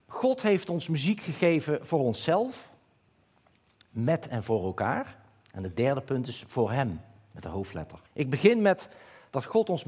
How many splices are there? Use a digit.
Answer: 1